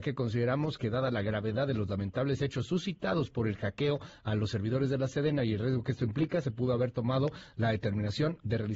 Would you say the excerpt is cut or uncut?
uncut